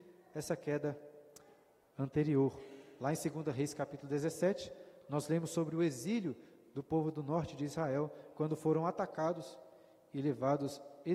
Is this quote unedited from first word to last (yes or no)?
yes